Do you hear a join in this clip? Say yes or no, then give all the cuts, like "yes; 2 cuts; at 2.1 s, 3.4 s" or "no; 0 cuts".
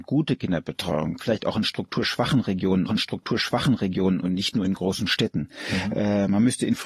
yes; 2 cuts; at 1.2 s, 2.9 s